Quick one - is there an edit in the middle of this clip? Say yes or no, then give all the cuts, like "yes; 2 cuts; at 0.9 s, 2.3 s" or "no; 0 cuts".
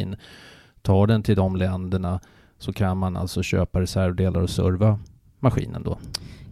no; 0 cuts